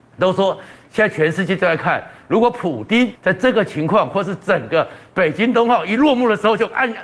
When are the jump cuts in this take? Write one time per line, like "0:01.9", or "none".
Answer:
0:03.2